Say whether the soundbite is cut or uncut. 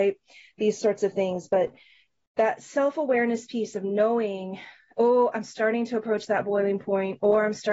uncut